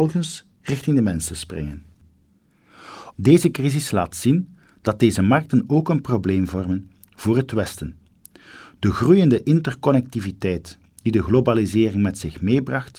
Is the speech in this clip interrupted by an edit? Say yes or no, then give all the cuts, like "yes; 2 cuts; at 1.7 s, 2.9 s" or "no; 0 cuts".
no; 0 cuts